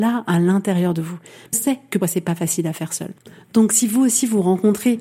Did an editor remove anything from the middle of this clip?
yes; 2 cuts; at 1.5 s, 2.0 s

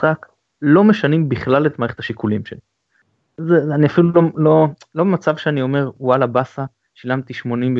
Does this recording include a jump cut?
no; 0 cuts

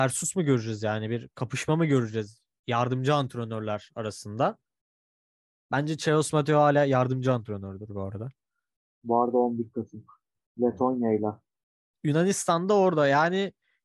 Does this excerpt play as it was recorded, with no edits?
yes; 0 cuts

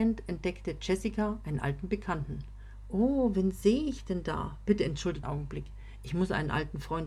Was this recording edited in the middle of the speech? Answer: yes; 1 cut; at 5.2 s

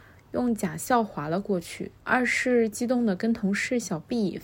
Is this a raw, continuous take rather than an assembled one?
no; 1 cut; at 2.0 s

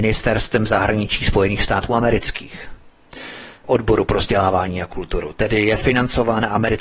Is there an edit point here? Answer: yes; 1 cut; at 3.6 s

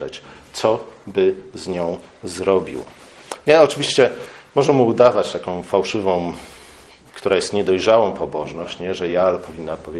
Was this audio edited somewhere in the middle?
no; 0 cuts

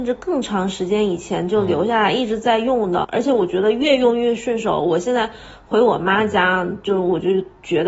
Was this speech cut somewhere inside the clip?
yes; 1 cut; at 3.0 s

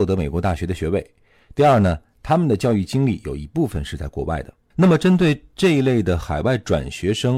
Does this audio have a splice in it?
no; 0 cuts

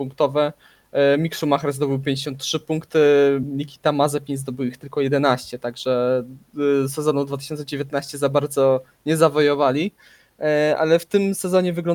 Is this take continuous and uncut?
yes; 0 cuts

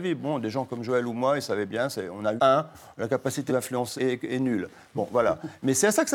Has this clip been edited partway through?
yes; 3 cuts; at 2.4 s, 3.5 s, 4.0 s

